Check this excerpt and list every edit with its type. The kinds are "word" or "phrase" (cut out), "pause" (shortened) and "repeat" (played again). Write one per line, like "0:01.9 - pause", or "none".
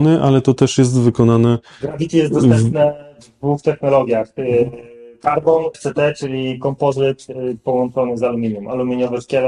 0:05.7 - word